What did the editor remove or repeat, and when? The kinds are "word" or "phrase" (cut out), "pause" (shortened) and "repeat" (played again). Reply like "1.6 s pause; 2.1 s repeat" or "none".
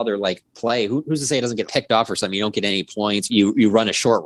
1.6 s word; 3.3 s phrase